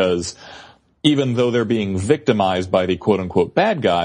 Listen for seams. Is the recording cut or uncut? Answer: uncut